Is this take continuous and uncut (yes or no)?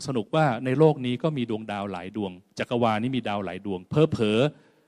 no